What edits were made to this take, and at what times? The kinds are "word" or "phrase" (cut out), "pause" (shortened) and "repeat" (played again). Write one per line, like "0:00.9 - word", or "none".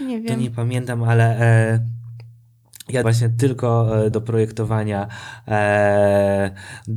0:03.0 - word
0:04.1 - word